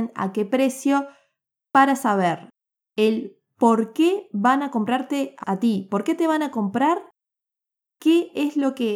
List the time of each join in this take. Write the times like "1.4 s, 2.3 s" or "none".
5.4 s